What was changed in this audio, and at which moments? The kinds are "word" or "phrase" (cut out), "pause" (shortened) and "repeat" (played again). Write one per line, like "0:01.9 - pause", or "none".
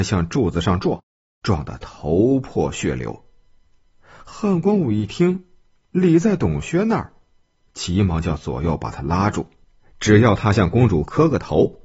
none